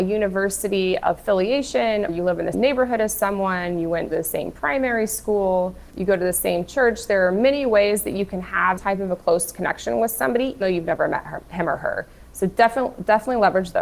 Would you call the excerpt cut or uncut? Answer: cut